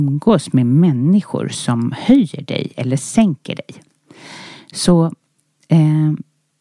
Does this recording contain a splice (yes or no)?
no